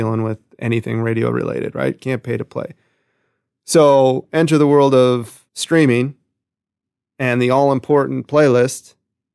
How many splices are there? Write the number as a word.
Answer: one